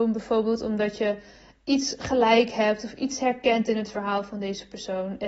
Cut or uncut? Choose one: uncut